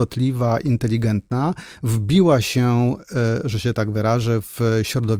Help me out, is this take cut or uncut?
uncut